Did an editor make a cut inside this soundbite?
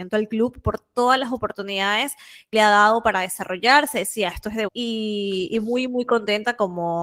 yes; 2 cuts; at 2.5 s, 4.7 s

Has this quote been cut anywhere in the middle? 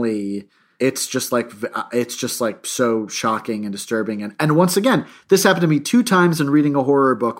no; 0 cuts

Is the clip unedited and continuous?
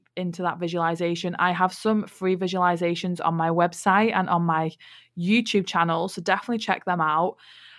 yes; 0 cuts

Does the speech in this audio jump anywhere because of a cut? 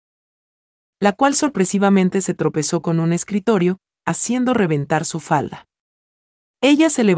no; 0 cuts

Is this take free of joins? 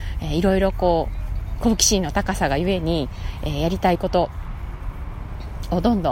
yes; 0 cuts

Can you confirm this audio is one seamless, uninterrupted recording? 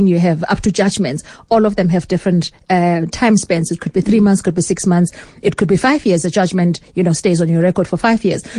yes; 0 cuts

